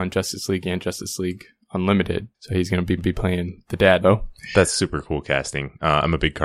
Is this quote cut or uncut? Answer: cut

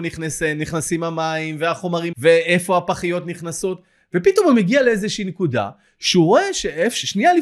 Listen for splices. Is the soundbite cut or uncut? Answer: cut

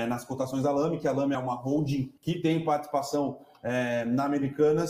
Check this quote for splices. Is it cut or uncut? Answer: cut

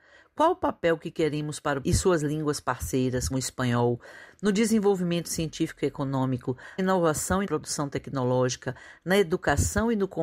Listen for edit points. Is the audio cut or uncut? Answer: cut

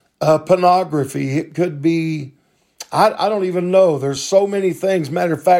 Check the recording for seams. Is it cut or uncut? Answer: uncut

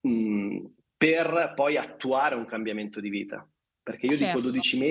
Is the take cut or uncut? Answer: uncut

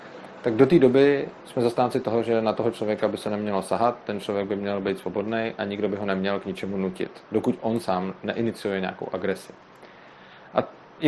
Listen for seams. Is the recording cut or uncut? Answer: uncut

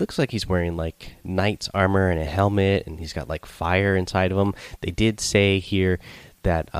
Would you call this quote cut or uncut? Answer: uncut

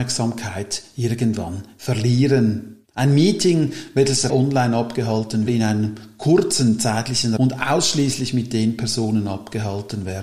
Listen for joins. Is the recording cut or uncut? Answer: cut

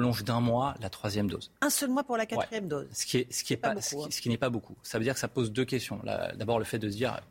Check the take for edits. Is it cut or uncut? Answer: uncut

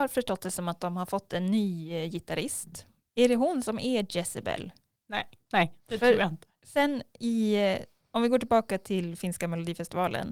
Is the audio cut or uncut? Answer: uncut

